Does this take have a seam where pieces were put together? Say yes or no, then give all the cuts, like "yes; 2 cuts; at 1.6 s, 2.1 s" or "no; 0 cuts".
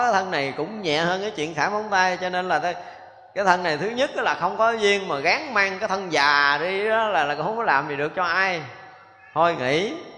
no; 0 cuts